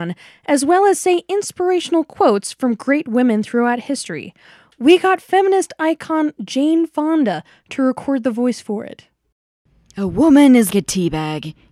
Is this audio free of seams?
no; 1 cut; at 10.7 s

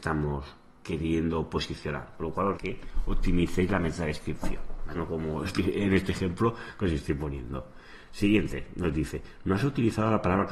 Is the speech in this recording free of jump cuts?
no; 2 cuts; at 2.5 s, 4.9 s

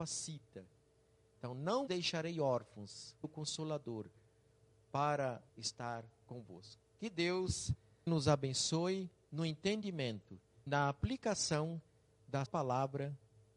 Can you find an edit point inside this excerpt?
yes; 6 cuts; at 1.9 s, 3.2 s, 5.5 s, 8.1 s, 10.7 s, 12.5 s

